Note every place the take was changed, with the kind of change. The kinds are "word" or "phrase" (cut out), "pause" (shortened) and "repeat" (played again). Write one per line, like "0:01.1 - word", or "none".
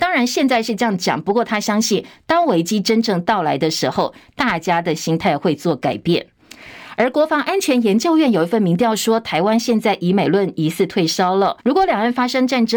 0:11.6 - pause